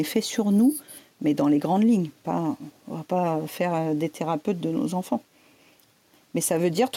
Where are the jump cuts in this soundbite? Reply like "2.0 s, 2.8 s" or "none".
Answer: none